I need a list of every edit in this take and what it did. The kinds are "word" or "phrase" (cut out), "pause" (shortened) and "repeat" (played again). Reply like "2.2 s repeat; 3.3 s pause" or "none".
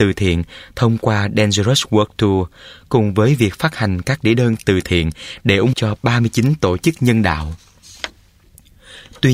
5.7 s word